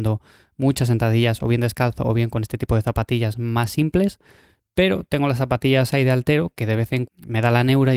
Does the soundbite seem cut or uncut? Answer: cut